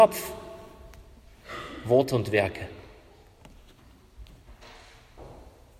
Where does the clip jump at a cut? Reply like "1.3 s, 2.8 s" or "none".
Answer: none

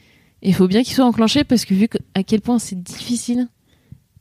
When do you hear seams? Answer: none

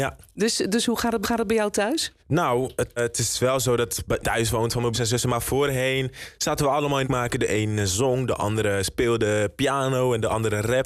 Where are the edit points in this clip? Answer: 1.2 s, 2.2 s, 3.0 s, 4.2 s, 4.9 s, 7.0 s

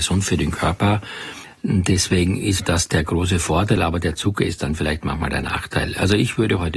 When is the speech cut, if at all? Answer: none

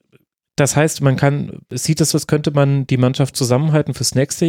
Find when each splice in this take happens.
2.1 s, 3.3 s

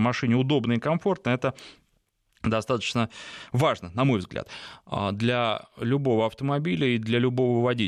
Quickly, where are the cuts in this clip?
none

